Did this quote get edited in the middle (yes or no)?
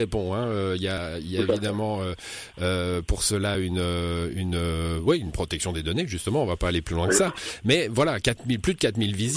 no